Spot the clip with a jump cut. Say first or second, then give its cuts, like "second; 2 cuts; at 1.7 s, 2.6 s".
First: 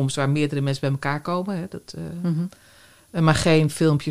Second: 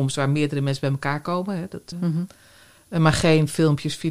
second; 1 cut; at 1.9 s